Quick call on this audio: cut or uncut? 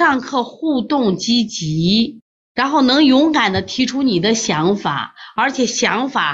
cut